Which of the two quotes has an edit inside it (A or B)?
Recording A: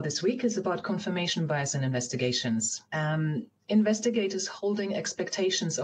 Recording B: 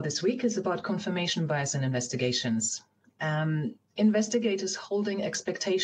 A